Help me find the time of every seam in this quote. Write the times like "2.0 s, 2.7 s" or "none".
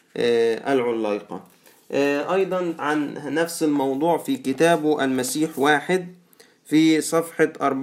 2.8 s